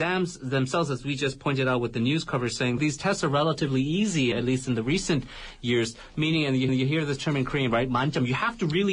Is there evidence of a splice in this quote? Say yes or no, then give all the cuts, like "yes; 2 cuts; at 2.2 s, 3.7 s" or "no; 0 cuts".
yes; 3 cuts; at 2.8 s, 4.3 s, 6.7 s